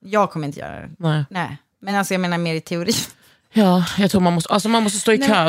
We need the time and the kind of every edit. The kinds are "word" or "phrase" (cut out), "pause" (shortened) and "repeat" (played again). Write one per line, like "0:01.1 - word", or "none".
none